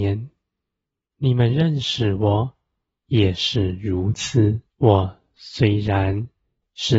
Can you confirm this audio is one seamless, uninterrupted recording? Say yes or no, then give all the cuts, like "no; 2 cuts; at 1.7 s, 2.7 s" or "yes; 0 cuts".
no; 1 cut; at 4.7 s